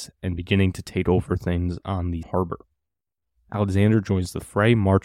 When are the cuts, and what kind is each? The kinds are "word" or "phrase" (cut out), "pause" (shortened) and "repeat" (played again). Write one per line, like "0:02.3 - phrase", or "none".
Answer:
0:02.2 - word